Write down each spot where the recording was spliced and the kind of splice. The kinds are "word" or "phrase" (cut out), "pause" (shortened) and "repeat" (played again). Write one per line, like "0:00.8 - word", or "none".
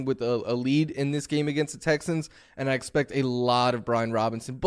none